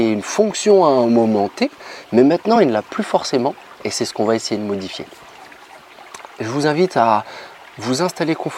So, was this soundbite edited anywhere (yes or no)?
no